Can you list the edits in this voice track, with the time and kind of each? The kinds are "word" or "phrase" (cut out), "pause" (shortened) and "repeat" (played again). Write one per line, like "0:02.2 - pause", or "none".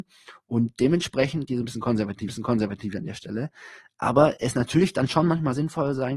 0:01.5 - phrase
0:02.3 - repeat